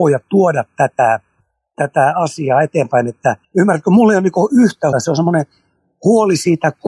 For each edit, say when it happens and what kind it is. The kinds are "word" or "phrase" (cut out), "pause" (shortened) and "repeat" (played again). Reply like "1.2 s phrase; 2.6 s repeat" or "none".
3.4 s pause; 4.9 s word

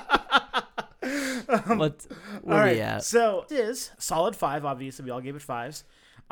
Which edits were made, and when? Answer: 3.5 s word; 3.9 s word

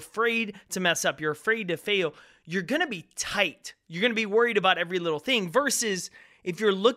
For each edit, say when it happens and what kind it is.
none

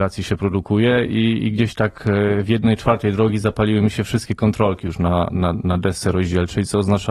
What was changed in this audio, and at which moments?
none

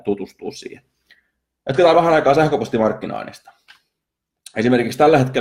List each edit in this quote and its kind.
1.9 s word

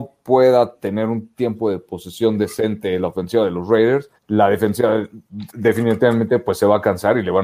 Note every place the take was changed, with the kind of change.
4.2 s pause

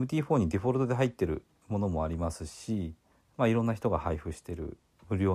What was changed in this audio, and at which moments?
3.1 s pause

